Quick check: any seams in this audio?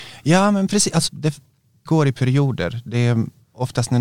yes; 2 cuts; at 1.1 s, 1.9 s

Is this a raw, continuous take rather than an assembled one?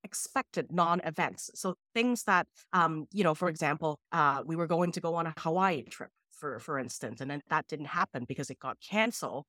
no; 1 cut; at 4.0 s

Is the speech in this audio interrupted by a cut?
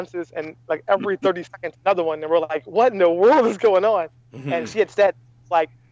no; 0 cuts

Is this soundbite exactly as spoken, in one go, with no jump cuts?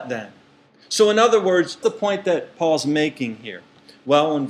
no; 1 cut; at 1.8 s

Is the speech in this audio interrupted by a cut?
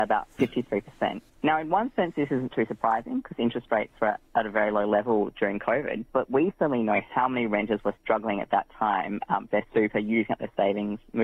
yes; 3 cuts; at 1.3 s, 6.1 s, 9.5 s

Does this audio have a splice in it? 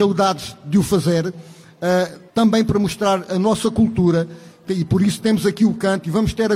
yes; 1 cut; at 2.3 s

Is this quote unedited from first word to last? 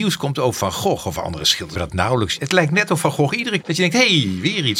no; 2 cuts; at 1.7 s, 3.6 s

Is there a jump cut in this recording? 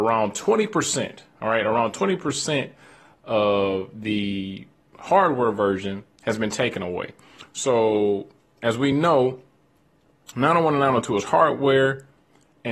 no; 0 cuts

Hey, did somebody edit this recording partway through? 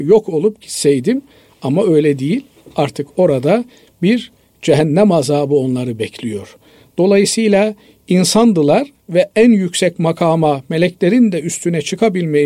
no; 0 cuts

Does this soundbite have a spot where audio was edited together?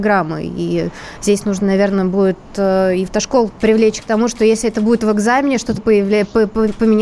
yes; 3 cuts; at 3.1 s, 3.5 s, 5.8 s

